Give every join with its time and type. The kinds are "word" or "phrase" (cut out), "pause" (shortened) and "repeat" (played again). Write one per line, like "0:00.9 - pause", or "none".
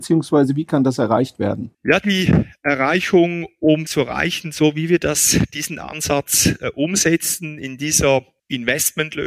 0:01.7 - pause
0:03.9 - phrase